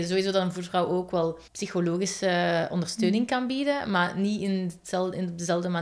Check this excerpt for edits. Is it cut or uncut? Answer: cut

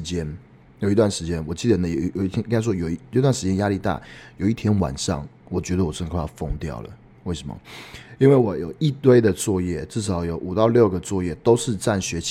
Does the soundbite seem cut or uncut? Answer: uncut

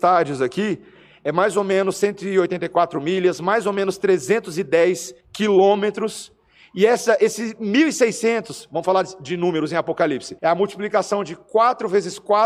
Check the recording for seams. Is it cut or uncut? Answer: cut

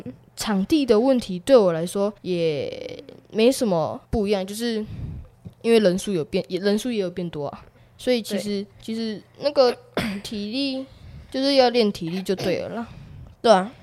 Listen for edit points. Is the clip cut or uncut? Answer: cut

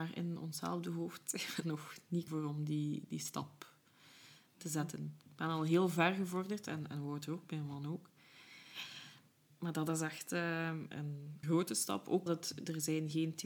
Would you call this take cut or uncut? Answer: cut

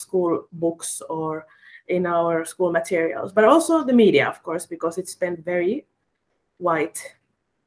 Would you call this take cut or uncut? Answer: uncut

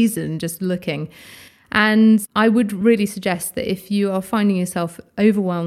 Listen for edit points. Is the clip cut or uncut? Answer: uncut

